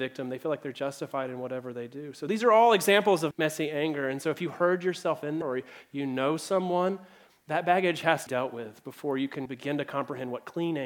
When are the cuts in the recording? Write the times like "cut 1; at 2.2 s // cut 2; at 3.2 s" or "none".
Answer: cut 1; at 3.3 s // cut 2; at 5.4 s // cut 3; at 8.3 s // cut 4; at 9.5 s